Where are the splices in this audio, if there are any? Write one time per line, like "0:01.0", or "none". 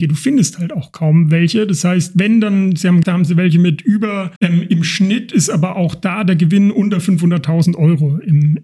0:03.0
0:04.4

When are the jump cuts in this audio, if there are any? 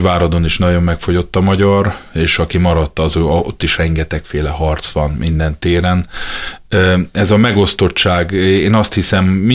none

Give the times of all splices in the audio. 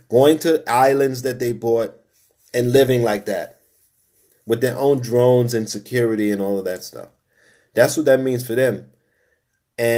none

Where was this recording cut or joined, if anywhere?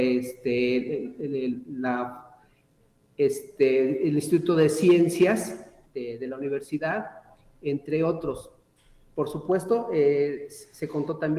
none

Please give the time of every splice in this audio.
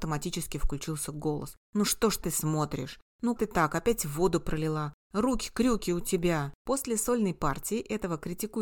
0:01.6
0:02.2
0:03.4
0:06.6

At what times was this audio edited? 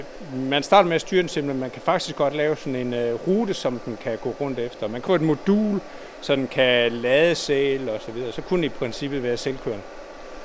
0:05.1

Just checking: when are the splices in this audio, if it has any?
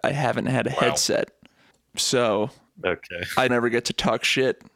0:01.7
0:03.5

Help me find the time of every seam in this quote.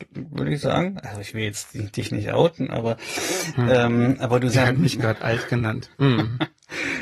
0:04.5

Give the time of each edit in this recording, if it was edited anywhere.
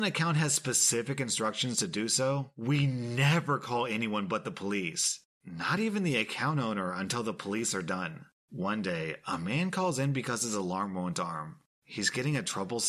none

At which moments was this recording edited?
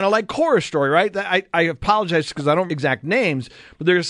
0:02.7

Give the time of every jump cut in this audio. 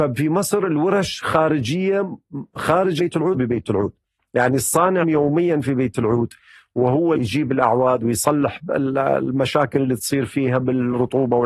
0:03.0
0:03.3
0:05.0
0:07.1

